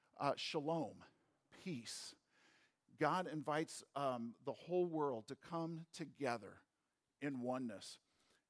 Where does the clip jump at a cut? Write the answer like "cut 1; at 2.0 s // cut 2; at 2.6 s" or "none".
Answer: none

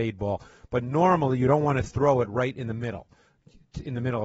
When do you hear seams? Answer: none

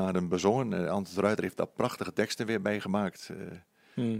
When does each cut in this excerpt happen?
none

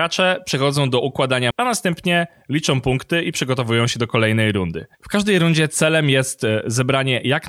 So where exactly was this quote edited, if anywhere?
cut 1; at 1.5 s // cut 2; at 4.9 s

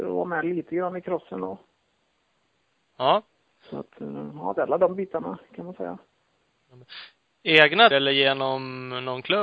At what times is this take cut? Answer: cut 1; at 7.9 s

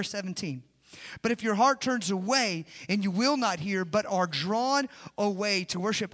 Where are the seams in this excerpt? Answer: none

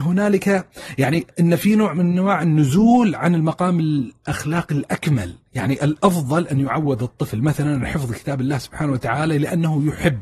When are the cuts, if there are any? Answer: cut 1; at 1.3 s

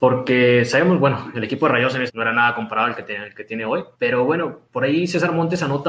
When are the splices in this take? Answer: cut 1; at 2.1 s // cut 2; at 3.9 s // cut 3; at 4.7 s

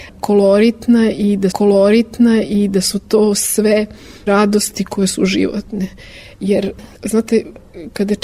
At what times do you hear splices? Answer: cut 1; at 1.5 s // cut 2; at 4.3 s // cut 3; at 6.9 s

